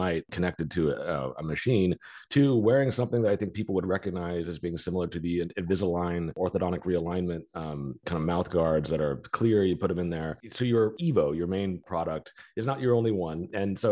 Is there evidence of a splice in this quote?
no; 0 cuts

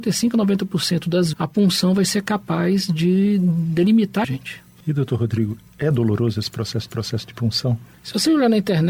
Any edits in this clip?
yes; 3 cuts; at 1.3 s, 4.2 s, 6.9 s

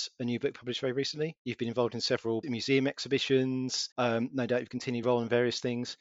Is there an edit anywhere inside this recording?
yes; 4 cuts; at 1.4 s, 2.4 s, 3.9 s, 5.0 s

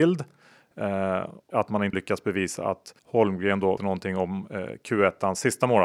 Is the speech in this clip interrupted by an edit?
yes; 4 cuts; at 1.5 s, 1.9 s, 3.0 s, 3.8 s

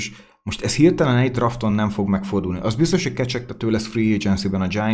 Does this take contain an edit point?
no; 0 cuts

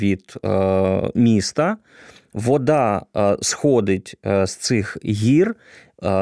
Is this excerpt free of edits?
yes; 0 cuts

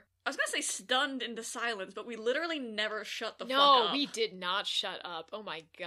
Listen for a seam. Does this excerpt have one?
no; 0 cuts

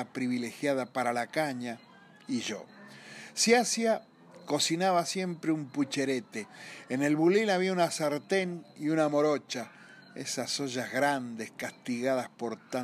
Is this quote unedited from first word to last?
yes; 0 cuts

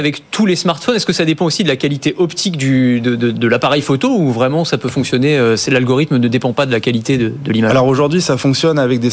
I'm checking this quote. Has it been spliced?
no; 0 cuts

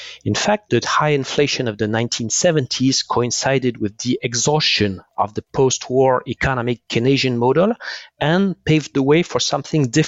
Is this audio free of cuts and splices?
yes; 0 cuts

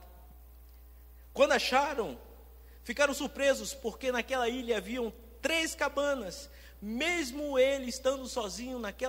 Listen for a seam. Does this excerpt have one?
no; 0 cuts

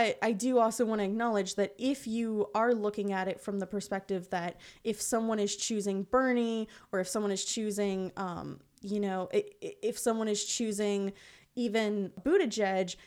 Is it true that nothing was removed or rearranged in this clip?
yes; 0 cuts

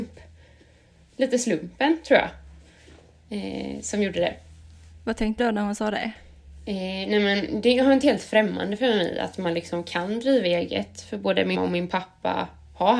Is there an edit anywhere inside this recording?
yes; 3 cuts; at 5.4 s, 8.0 s, 11.5 s

